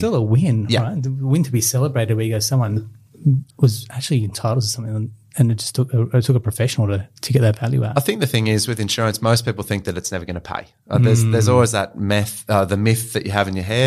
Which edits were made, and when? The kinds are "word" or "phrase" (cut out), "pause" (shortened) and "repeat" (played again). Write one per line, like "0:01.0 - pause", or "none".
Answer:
0:03.5 - pause
0:07.2 - pause

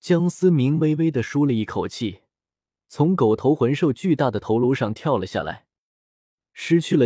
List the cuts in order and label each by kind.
none

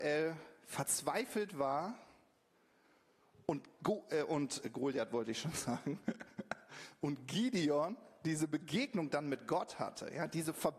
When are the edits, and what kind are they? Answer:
none

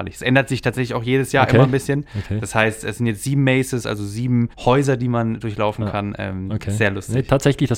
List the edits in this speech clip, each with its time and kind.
0:04.5 - pause

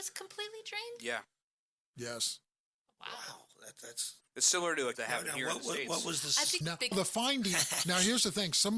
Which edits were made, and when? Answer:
0:02.8 - pause
0:04.2 - word
0:04.9 - phrase
0:06.6 - word
0:06.9 - word

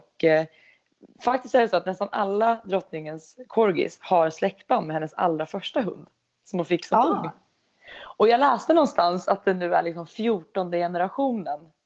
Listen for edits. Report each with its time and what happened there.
none

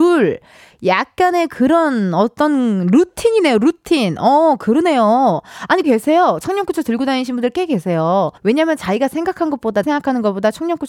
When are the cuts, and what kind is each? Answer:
0:05.8 - word
0:08.4 - pause
0:09.8 - word

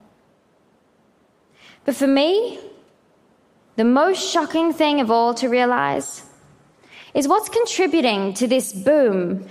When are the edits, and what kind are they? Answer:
none

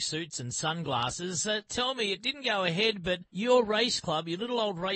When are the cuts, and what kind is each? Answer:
0:03.3 - pause

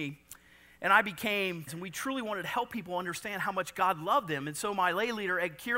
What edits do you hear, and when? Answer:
0:01.7 - word

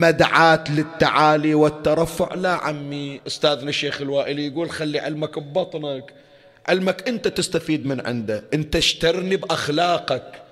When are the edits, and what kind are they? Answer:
none

